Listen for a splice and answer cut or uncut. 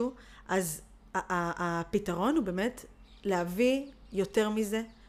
uncut